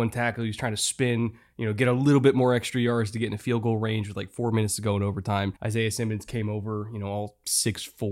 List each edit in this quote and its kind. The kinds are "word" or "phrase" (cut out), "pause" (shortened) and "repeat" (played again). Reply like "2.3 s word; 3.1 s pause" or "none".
5.6 s pause